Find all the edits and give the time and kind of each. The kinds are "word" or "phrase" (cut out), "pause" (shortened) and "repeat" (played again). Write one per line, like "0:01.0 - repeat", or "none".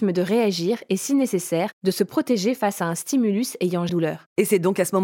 0:03.9 - phrase